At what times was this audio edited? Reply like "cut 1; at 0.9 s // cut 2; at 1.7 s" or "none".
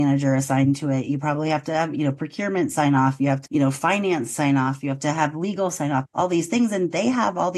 cut 1; at 3.5 s